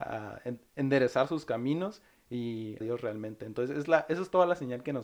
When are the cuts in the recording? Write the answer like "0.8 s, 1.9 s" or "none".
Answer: 2.8 s